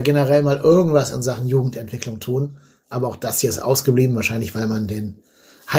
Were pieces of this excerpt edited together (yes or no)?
no